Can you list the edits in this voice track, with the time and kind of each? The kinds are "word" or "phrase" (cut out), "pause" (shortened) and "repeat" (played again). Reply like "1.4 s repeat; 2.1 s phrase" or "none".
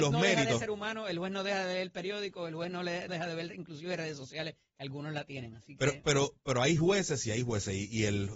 3.1 s word